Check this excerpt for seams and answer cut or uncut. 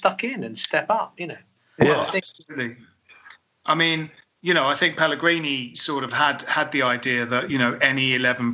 uncut